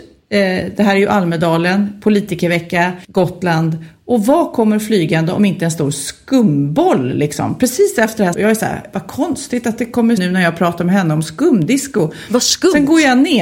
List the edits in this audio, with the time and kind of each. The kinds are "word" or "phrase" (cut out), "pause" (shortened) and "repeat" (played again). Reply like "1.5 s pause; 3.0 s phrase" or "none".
3.0 s pause; 8.3 s word; 10.2 s word